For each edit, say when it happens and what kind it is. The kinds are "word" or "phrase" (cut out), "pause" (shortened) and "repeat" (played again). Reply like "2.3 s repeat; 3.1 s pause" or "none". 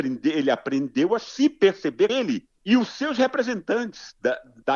2.1 s word; 2.6 s pause